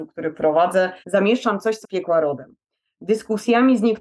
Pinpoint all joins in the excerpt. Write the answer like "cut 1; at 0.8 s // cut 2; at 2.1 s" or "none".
cut 1; at 1.0 s // cut 2; at 1.8 s